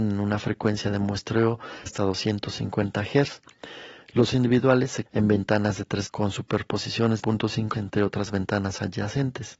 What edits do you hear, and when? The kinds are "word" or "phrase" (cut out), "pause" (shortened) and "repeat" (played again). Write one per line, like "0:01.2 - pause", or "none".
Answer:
0:01.9 - word
0:04.3 - word
0:05.1 - word
0:06.1 - word
0:07.2 - word
0:07.7 - word